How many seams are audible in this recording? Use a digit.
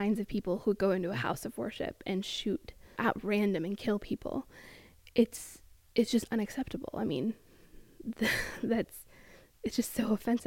0